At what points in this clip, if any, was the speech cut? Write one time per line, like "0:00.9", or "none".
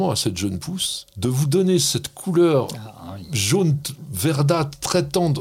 0:01.1